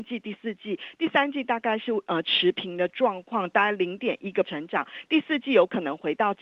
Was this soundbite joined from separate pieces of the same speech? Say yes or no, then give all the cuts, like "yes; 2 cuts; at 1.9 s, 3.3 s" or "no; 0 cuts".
yes; 1 cut; at 4.4 s